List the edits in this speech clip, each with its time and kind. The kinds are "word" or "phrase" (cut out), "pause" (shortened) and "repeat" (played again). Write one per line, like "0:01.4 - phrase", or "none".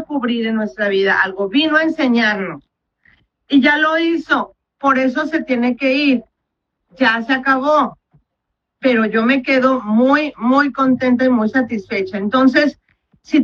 none